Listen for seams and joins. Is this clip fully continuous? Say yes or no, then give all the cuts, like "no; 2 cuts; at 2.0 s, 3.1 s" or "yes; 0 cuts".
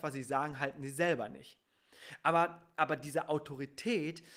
yes; 0 cuts